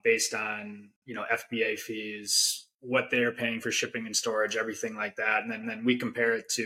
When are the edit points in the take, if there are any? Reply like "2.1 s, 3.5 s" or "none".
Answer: 2.7 s, 5.6 s

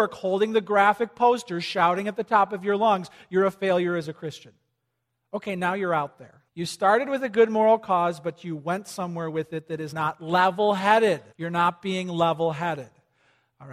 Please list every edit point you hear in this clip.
6.5 s, 9.9 s, 11.3 s

